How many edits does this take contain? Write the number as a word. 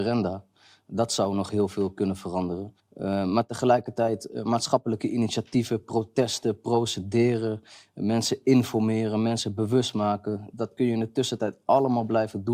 one